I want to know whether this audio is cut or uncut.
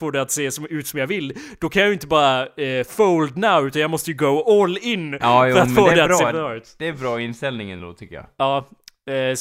uncut